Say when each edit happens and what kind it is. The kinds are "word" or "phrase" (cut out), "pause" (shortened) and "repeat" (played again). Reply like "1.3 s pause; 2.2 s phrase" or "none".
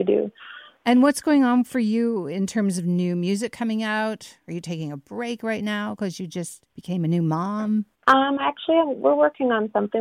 6.7 s pause; 8.0 s pause

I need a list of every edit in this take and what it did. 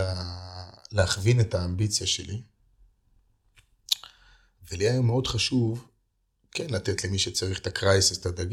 none

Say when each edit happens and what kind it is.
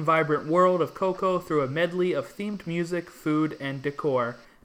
none

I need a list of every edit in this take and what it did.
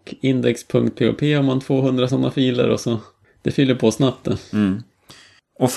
2.1 s word

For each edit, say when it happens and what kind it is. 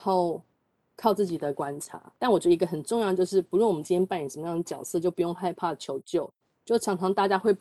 2.2 s pause

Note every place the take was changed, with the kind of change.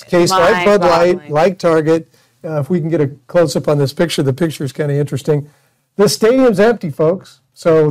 none

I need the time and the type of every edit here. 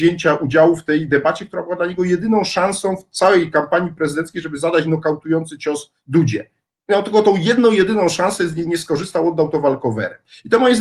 none

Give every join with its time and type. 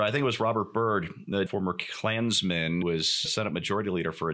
1.5 s word; 2.8 s word; 3.3 s word

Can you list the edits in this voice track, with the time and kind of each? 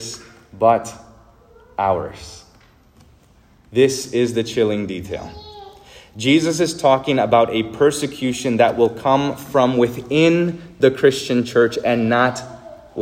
none

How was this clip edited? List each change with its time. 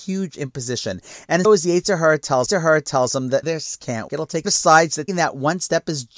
1.4 s word; 2.5 s repeat; 3.4 s word; 4.1 s word; 4.4 s phrase; 5.1 s word

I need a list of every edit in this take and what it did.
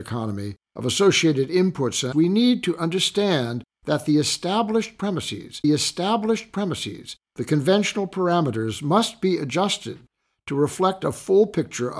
2.1 s word; 5.6 s repeat

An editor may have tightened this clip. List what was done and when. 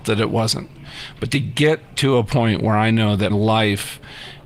3.3 s word

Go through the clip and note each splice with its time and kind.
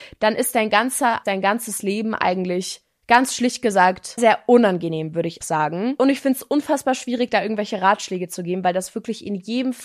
1.2 s word; 3.0 s pause; 4.2 s word; 5.4 s word

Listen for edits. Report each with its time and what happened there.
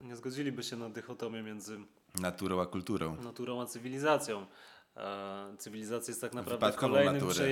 none

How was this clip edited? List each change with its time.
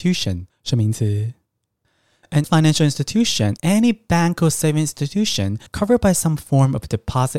2.4 s word; 3.6 s word; 5.7 s pause

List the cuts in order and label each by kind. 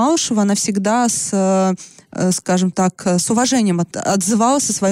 3.9 s word

